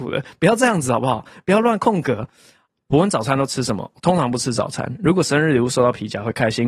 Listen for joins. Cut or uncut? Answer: uncut